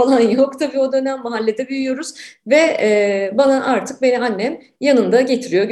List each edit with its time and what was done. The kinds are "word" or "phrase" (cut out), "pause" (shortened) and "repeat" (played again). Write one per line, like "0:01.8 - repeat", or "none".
none